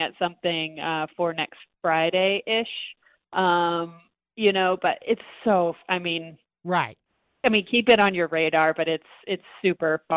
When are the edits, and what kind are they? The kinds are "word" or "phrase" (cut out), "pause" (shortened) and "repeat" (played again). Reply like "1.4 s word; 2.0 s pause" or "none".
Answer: none